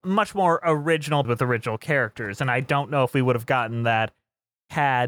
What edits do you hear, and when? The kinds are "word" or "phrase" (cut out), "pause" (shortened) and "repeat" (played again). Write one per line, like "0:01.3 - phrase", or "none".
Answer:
0:01.2 - word